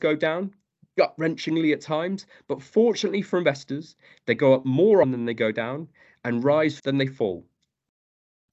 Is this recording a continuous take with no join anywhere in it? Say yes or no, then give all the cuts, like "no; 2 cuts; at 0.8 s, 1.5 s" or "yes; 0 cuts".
no; 2 cuts; at 5.0 s, 6.8 s